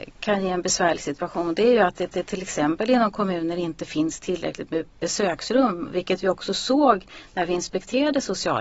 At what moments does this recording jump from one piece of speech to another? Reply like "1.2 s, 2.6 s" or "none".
2.1 s